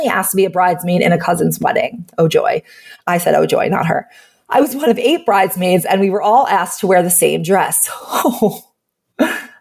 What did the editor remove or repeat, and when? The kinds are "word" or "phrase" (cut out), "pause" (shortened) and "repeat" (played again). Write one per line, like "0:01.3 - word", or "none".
none